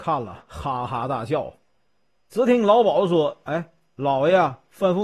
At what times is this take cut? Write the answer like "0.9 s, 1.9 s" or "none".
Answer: none